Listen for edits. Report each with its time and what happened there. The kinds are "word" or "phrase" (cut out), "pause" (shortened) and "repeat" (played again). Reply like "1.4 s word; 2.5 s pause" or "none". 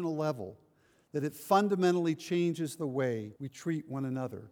3.4 s pause